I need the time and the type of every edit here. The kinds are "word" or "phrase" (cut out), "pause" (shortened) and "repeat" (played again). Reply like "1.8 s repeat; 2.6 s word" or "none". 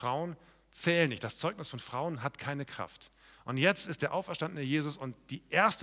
none